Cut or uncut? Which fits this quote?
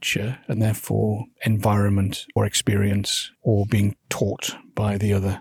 cut